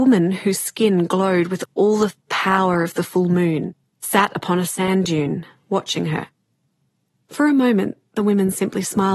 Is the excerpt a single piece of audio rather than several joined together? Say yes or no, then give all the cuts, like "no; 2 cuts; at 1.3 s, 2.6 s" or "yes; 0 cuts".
yes; 0 cuts